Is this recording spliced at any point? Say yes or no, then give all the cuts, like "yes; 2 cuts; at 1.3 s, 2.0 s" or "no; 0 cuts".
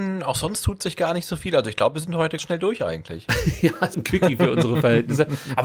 yes; 2 cuts; at 2.4 s, 3.9 s